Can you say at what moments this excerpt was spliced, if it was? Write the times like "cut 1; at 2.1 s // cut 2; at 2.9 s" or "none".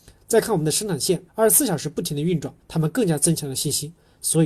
cut 1; at 1.3 s // cut 2; at 2.6 s